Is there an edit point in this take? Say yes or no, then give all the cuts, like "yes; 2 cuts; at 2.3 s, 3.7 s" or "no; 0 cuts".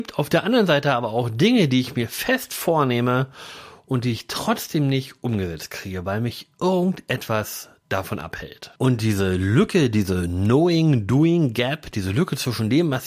yes; 1 cut; at 8.8 s